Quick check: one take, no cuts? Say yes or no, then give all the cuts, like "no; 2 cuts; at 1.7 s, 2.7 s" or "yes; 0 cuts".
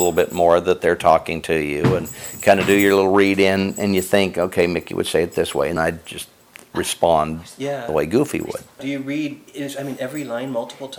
no; 2 cuts; at 5.8 s, 9.5 s